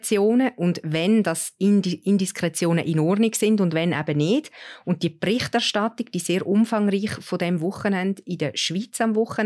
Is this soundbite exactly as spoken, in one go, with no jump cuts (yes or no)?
yes